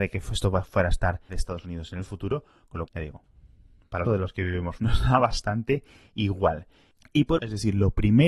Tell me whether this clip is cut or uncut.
cut